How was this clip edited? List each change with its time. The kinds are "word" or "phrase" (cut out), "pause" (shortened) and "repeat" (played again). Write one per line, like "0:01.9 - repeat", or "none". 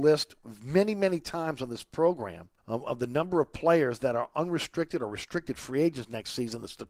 0:02.6 - pause